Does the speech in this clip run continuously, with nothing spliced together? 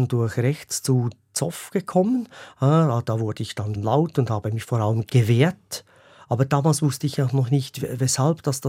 no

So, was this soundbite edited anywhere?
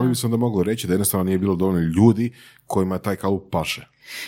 no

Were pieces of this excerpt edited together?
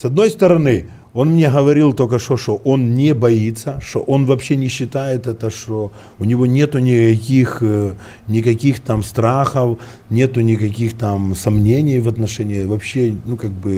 no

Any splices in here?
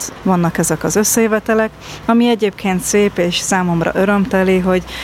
no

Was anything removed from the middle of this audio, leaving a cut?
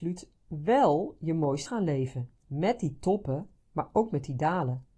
yes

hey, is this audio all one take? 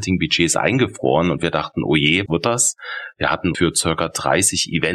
no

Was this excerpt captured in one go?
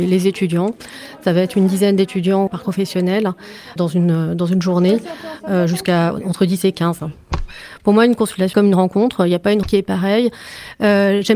no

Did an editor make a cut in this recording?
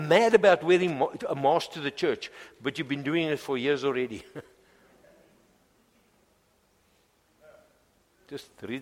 no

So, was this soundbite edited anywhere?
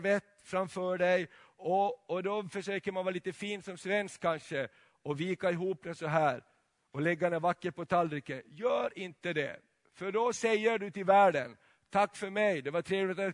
no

